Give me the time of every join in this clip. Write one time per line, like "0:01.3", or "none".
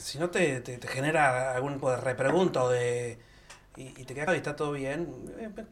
0:01.8
0:04.3